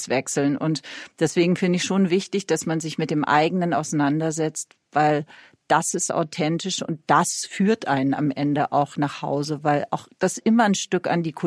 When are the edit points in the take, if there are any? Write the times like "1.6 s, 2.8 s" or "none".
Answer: none